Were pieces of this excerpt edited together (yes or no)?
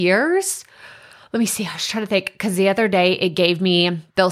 no